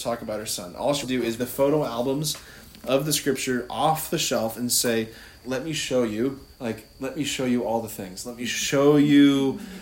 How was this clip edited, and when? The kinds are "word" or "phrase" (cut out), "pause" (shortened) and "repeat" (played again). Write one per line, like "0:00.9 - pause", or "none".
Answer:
0:01.0 - word
0:01.4 - word
0:05.4 - word
0:06.5 - pause